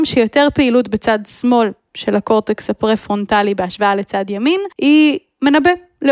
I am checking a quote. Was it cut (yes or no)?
yes